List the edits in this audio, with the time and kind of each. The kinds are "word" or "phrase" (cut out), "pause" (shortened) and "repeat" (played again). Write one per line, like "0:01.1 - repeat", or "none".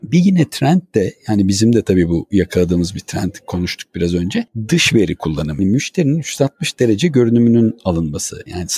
0:05.6 - word